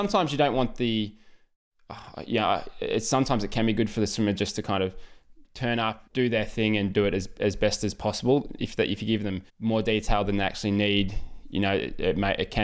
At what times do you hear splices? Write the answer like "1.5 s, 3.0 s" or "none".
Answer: 5.4 s, 6.1 s, 9.5 s